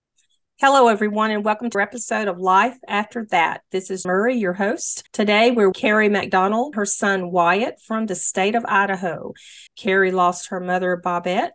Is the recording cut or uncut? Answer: cut